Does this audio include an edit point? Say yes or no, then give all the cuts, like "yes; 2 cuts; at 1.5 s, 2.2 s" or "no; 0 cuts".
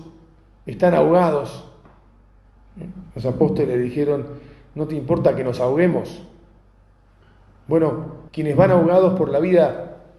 yes; 2 cuts; at 3.1 s, 8.3 s